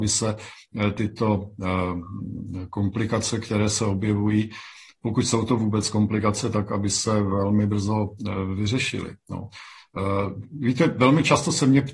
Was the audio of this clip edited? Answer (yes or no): no